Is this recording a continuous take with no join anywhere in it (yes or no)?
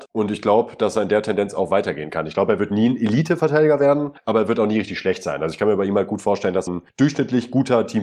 no